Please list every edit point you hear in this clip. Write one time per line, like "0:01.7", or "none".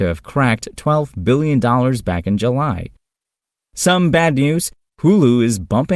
none